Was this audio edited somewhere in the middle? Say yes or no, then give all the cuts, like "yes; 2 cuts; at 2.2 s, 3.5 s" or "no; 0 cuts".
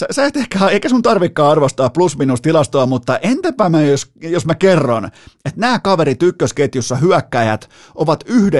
no; 0 cuts